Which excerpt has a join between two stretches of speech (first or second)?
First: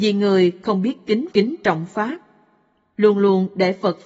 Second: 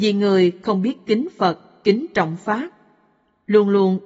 first